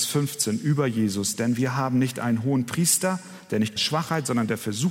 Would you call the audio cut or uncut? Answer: cut